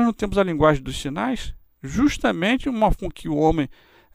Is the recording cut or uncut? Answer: cut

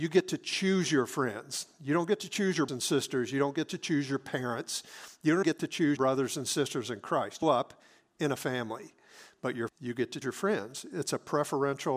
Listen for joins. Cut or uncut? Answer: cut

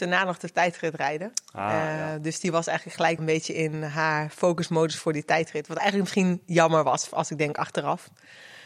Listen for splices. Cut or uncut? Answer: cut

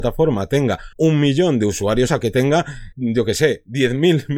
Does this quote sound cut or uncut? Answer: cut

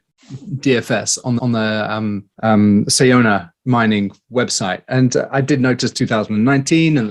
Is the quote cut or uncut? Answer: cut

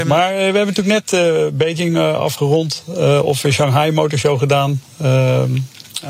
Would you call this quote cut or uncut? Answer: uncut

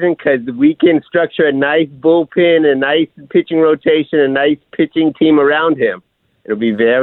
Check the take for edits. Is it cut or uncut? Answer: uncut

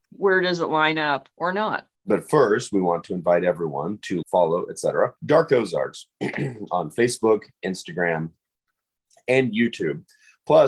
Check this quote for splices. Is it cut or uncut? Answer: cut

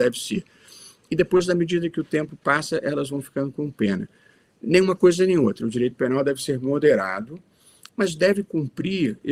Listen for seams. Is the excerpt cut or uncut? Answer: uncut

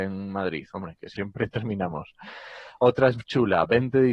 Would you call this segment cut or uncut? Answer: cut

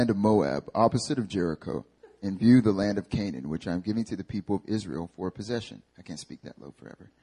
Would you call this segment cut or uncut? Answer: cut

